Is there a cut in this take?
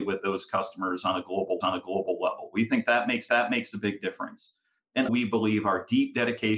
yes; 3 cuts; at 1.6 s, 3.3 s, 5.1 s

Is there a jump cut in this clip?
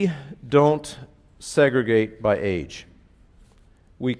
no; 0 cuts

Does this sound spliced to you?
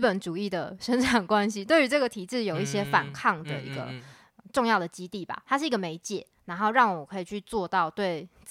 yes; 1 cut; at 6.4 s

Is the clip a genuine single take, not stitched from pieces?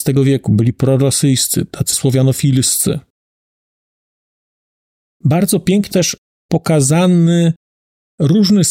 no; 2 cuts; at 1.9 s, 5.9 s

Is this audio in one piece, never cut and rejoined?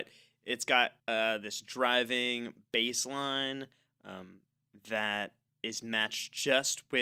no; 2 cuts; at 1.0 s, 5.5 s

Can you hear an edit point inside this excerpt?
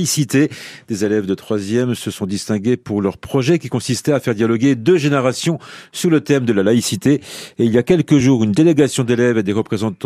no; 0 cuts

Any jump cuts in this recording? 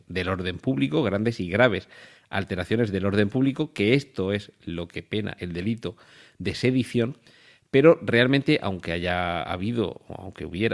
no; 0 cuts

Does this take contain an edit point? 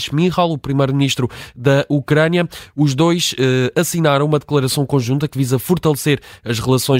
no; 0 cuts

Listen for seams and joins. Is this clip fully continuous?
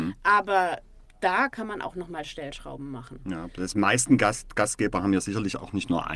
yes; 0 cuts

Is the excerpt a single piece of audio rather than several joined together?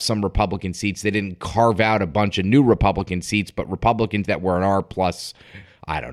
no; 1 cut; at 4.2 s

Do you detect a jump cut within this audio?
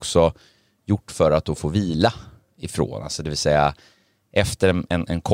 no; 0 cuts

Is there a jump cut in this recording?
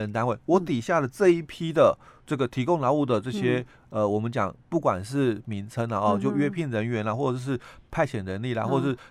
no; 0 cuts

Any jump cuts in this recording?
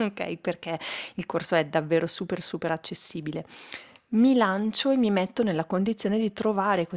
no; 0 cuts

